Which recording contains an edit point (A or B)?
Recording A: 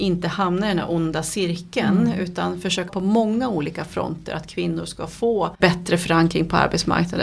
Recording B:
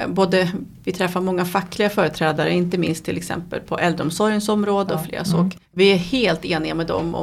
A